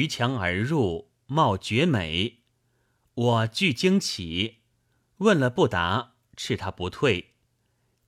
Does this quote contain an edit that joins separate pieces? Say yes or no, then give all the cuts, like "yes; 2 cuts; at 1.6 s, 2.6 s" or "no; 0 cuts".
no; 0 cuts